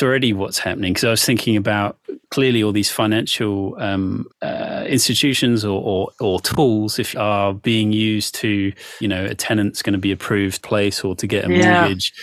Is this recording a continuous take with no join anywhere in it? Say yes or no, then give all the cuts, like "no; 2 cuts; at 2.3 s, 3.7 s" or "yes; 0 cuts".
no; 5 cuts; at 4.3 s, 6.1 s, 7.1 s, 9.0 s, 10.6 s